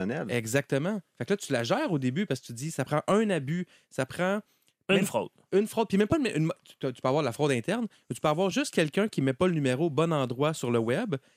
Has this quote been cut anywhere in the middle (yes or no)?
no